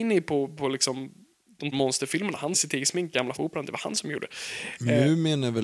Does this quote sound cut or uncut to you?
cut